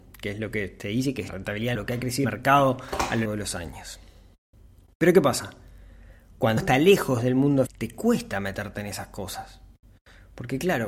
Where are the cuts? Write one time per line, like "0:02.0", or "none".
0:01.3
0:01.7
0:02.2
0:03.2
0:06.6
0:07.7